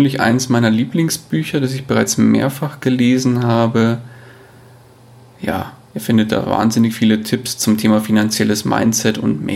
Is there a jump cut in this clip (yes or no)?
no